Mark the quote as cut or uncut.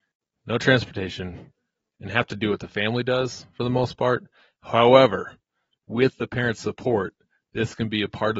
uncut